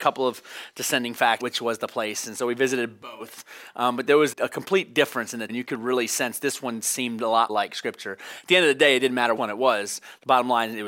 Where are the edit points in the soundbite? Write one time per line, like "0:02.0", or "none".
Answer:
0:01.4
0:04.3
0:05.5
0:07.5
0:09.4